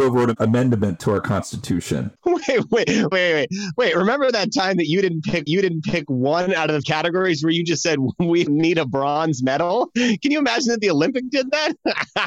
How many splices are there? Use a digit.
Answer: 6